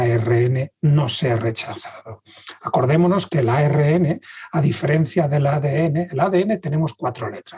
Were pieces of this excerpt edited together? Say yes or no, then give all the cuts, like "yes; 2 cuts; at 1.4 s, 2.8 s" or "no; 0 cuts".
no; 0 cuts